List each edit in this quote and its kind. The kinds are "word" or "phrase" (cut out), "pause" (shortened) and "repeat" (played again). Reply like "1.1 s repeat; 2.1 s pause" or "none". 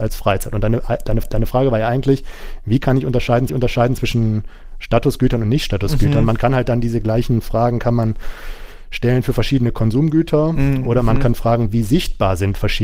1.2 s repeat; 3.5 s repeat